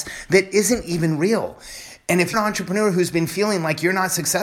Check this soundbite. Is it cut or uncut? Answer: cut